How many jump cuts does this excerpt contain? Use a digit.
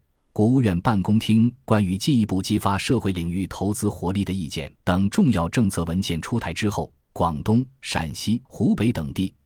2